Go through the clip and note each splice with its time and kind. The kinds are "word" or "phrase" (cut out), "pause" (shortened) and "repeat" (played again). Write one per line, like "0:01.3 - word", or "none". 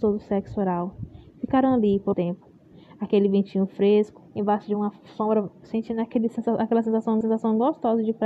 0:02.1 - word
0:04.3 - pause
0:07.2 - repeat

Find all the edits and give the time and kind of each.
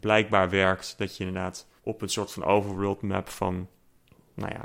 0:01.8 - pause

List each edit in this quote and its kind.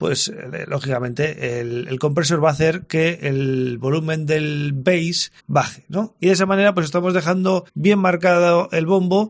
0:05.4 - pause
0:07.7 - pause

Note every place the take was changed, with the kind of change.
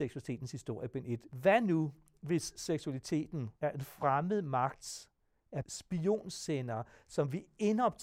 0:03.6 - pause
0:05.6 - word

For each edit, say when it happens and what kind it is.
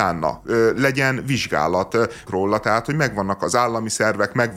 0:02.3 - word

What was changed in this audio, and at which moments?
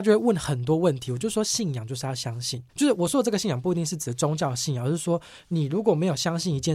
0:02.7 - pause

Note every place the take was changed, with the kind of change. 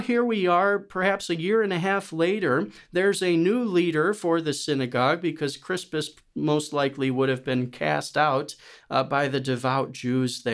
none

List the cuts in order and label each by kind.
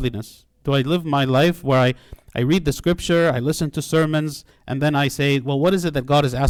none

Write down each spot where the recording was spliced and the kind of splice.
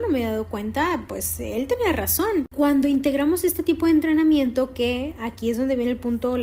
none

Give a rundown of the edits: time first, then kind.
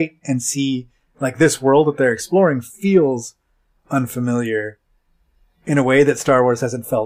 none

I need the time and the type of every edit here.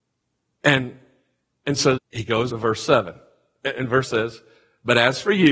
0:02.0 - word
0:02.5 - word
0:04.0 - word

